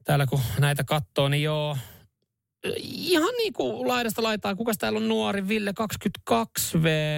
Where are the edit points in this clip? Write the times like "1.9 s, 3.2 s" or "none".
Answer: none